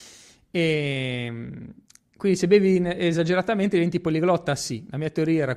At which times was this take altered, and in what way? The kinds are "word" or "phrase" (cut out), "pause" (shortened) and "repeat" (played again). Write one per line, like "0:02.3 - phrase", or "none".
0:01.8 - pause